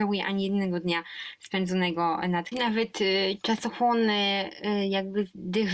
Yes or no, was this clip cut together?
yes